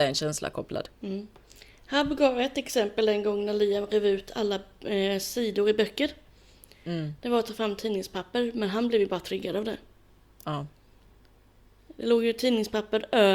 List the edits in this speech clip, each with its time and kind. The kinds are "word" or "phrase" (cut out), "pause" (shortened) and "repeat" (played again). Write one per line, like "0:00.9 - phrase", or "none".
0:00.9 - pause